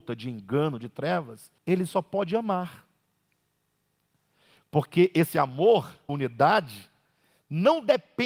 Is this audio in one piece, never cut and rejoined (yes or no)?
no